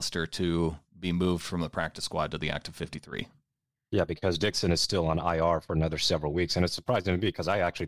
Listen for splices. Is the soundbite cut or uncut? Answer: uncut